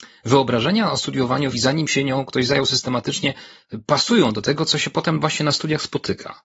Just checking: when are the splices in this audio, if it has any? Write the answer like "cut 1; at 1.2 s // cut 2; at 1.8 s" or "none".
cut 1; at 1.5 s